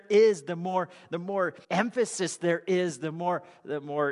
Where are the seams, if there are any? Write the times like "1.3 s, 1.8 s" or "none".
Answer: 1.6 s